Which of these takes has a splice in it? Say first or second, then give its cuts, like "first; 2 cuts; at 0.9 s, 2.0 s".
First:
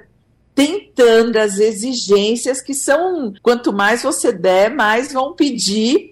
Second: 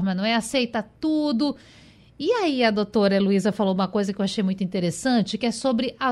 first; 2 cuts; at 1.3 s, 3.4 s